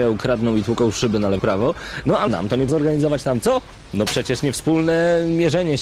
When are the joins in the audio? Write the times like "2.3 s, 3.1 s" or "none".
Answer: 1.4 s, 2.3 s, 2.7 s